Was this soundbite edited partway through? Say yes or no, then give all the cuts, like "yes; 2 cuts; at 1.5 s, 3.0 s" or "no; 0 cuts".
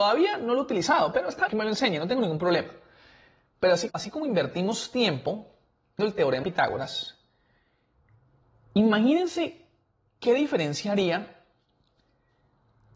yes; 4 cuts; at 1.5 s, 3.9 s, 6.0 s, 6.4 s